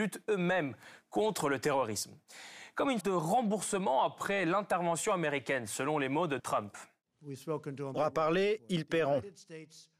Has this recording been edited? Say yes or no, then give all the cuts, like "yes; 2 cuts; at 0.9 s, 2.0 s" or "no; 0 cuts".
yes; 3 cuts; at 3.0 s, 6.4 s, 8.0 s